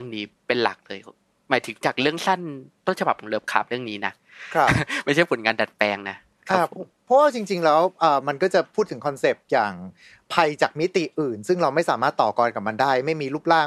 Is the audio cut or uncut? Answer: uncut